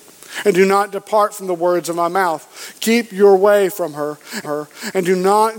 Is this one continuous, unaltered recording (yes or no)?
no